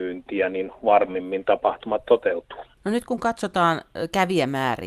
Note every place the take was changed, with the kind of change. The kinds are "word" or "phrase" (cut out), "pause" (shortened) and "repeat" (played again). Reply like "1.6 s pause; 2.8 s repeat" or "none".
2.7 s pause